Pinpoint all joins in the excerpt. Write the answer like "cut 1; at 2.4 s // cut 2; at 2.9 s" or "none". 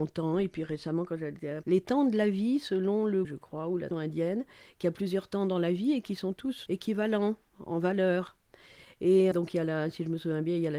cut 1; at 1.6 s // cut 2; at 3.2 s // cut 3; at 3.9 s // cut 4; at 6.7 s // cut 5; at 9.3 s